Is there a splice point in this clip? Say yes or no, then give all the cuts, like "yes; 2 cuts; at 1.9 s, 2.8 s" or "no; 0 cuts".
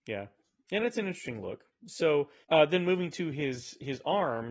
yes; 1 cut; at 2.4 s